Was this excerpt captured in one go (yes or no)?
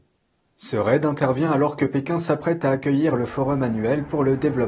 yes